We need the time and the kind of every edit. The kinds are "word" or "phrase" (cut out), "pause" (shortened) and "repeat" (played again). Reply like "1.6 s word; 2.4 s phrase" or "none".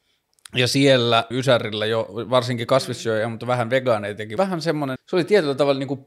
1.3 s word; 4.4 s phrase; 5.0 s phrase